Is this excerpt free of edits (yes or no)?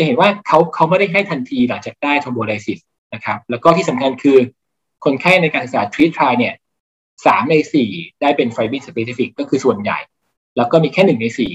yes